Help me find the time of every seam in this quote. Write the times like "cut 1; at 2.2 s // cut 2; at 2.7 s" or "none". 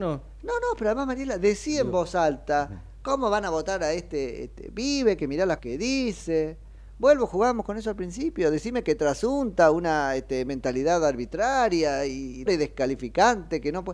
cut 1; at 5.6 s // cut 2; at 12.5 s